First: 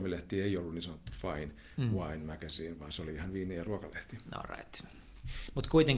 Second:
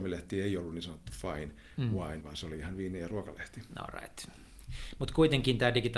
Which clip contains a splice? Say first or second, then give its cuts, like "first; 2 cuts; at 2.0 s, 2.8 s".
second; 1 cut; at 2.2 s